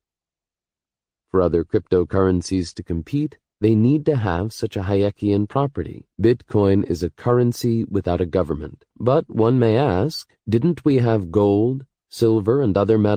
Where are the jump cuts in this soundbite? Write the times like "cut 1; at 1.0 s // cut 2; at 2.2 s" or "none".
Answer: cut 1; at 3.5 s // cut 2; at 6.1 s // cut 3; at 8.9 s // cut 4; at 10.4 s